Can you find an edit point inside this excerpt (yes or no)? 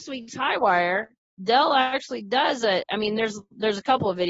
no